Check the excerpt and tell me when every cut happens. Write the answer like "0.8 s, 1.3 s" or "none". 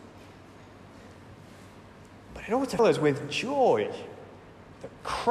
2.8 s